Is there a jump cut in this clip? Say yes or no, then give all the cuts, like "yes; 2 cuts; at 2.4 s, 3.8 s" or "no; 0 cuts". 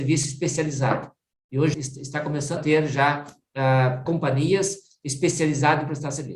yes; 3 cuts; at 1.7 s, 2.6 s, 4.1 s